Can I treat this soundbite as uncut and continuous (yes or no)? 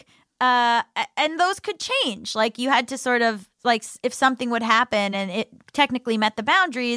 yes